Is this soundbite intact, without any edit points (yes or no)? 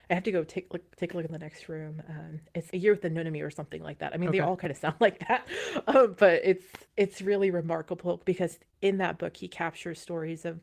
no